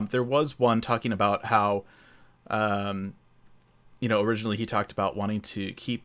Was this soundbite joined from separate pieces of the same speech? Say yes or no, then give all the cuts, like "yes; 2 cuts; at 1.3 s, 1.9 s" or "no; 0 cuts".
no; 0 cuts